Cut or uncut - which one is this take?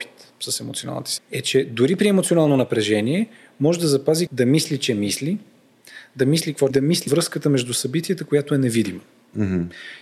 cut